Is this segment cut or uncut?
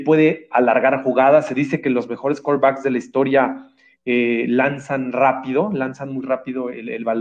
uncut